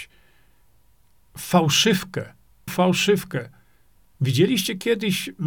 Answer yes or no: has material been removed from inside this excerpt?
yes